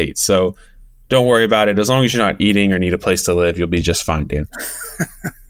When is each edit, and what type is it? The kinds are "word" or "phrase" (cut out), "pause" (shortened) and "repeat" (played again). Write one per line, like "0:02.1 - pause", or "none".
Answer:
none